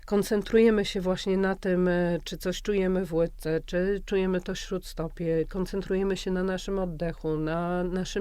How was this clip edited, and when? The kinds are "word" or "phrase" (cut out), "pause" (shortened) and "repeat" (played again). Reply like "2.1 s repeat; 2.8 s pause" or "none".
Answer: none

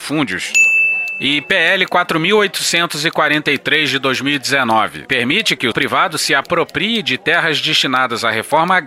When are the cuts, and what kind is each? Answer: 5.7 s word

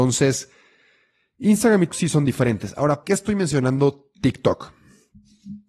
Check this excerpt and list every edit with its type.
1.9 s word; 3.0 s word

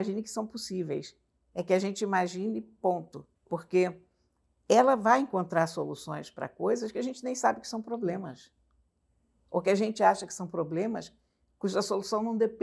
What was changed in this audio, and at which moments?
3.4 s pause

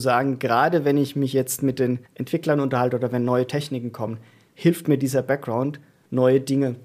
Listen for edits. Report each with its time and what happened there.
2.1 s pause

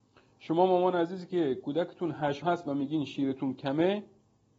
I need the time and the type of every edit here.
2.4 s word

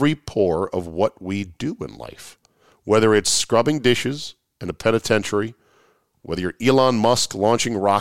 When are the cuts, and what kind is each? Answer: none

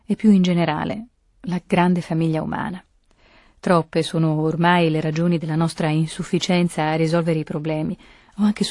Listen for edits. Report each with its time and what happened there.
none

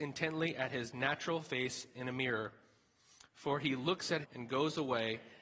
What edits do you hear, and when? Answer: 4.2 s word

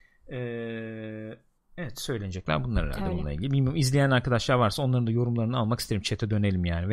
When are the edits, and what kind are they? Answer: 1.6 s pause

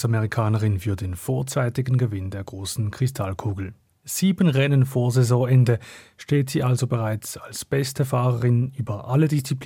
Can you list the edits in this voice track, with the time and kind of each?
none

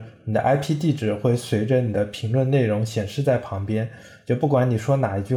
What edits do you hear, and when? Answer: none

